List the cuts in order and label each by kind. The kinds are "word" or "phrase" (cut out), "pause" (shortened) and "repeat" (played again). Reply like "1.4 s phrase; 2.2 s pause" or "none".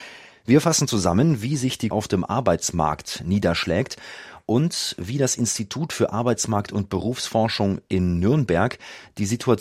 1.9 s word